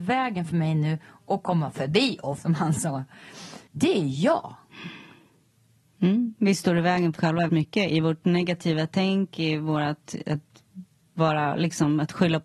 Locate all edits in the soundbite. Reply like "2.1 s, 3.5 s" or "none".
2.4 s, 3.7 s, 7.2 s, 7.5 s